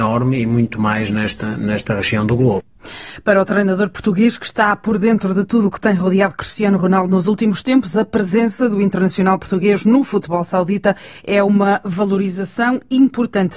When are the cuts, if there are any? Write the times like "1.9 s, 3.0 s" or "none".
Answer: none